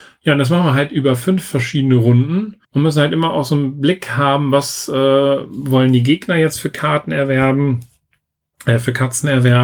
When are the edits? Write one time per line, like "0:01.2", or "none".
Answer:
0:02.6